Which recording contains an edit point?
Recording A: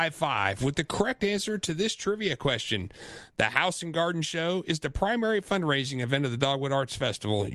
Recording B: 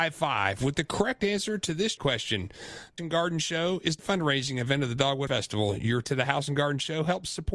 B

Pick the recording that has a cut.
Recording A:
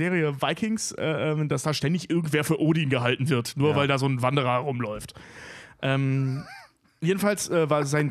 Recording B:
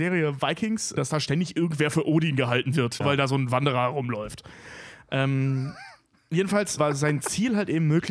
B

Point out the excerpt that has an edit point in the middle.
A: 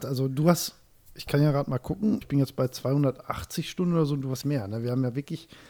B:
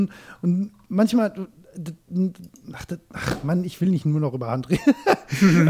A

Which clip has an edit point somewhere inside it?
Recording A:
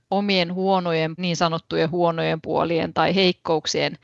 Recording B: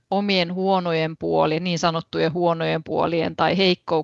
A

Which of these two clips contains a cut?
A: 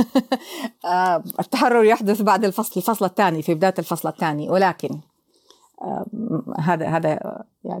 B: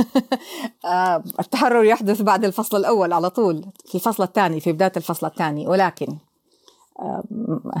A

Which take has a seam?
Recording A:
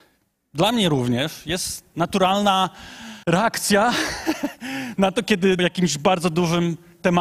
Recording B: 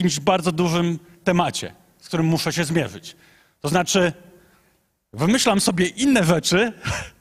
A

